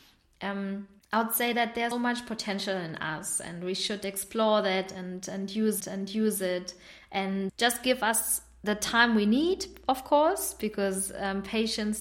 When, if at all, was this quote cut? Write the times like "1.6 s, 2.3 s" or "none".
1.0 s, 1.9 s, 5.8 s, 7.5 s